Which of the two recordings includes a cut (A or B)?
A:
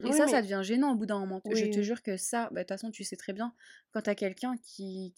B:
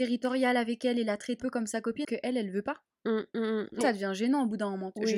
B